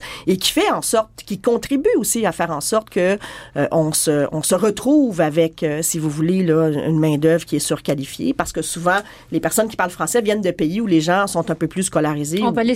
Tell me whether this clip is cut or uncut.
uncut